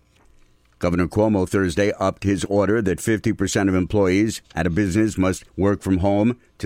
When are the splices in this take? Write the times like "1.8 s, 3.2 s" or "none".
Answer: 5.5 s